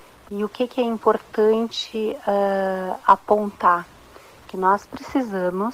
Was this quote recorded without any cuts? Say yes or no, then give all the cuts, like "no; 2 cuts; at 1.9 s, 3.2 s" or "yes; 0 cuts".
yes; 0 cuts